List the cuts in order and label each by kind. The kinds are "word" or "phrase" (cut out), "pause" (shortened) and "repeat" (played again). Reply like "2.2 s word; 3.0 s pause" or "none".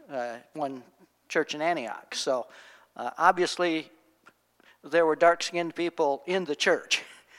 none